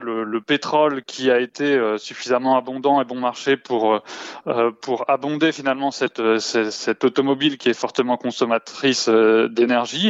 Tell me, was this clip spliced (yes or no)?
no